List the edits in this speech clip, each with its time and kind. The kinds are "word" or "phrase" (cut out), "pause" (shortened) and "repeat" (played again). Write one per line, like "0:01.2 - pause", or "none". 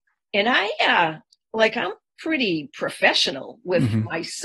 none